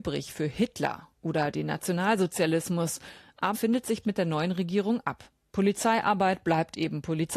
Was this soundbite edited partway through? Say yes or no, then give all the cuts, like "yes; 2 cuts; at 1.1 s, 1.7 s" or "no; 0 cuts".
yes; 2 cuts; at 3.5 s, 4.0 s